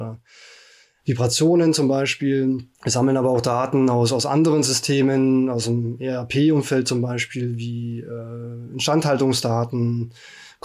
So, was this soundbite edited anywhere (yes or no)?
yes